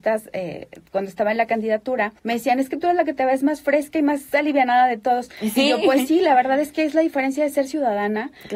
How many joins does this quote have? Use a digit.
1